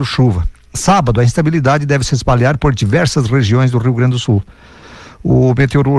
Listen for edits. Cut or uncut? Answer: uncut